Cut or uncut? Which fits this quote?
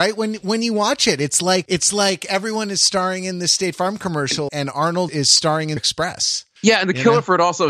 cut